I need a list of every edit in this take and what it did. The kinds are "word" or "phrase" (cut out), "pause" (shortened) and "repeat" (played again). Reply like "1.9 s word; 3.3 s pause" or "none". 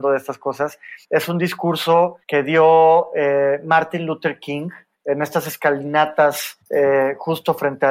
1.0 s pause; 2.2 s pause; 4.9 s pause; 6.6 s pause

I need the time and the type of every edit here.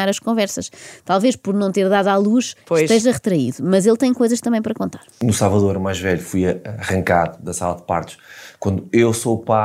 2.6 s pause

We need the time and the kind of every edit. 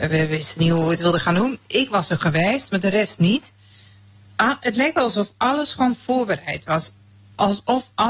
none

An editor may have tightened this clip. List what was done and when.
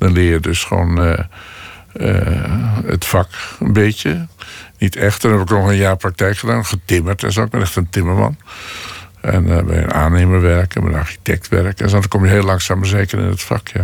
none

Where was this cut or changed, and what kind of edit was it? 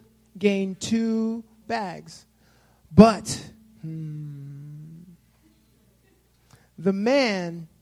1.6 s word

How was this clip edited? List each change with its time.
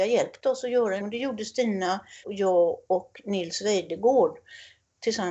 1.0 s word; 2.2 s word

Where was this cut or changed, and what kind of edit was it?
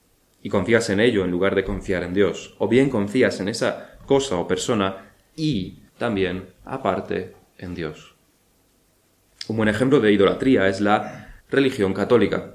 5.9 s pause; 11.4 s pause

